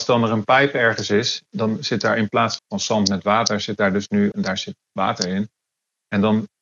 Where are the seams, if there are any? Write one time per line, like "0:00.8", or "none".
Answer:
0:02.6
0:04.3